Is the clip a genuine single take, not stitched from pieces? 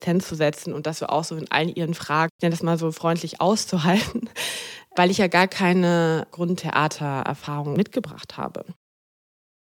yes; 0 cuts

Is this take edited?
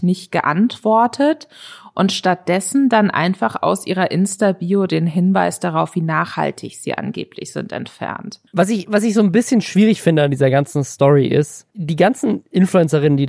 yes; 2 cuts; at 8.5 s, 11.7 s

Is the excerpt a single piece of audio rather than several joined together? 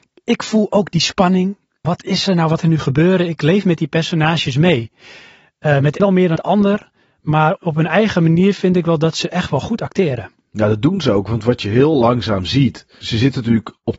no; 6 cuts; at 1.8 s, 2.6 s, 6.0 s, 6.4 s, 7.6 s, 13.0 s

